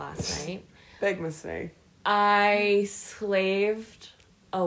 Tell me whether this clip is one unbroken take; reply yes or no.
yes